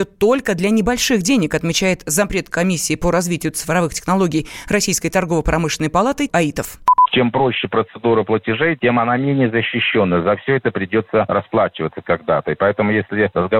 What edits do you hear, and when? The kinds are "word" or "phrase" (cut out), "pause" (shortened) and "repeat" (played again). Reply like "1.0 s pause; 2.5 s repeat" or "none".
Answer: 6.3 s word